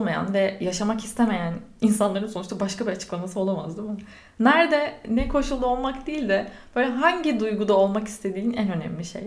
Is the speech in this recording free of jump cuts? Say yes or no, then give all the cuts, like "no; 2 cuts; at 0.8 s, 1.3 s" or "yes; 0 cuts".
yes; 0 cuts